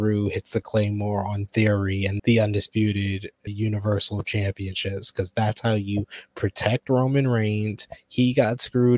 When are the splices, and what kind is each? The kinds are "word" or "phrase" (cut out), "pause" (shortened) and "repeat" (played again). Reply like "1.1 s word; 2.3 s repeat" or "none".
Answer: 2.2 s phrase; 3.5 s word